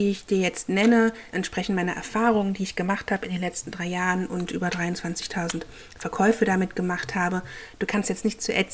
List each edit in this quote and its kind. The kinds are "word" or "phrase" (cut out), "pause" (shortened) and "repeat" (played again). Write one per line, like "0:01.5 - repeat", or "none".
0:01.3 - word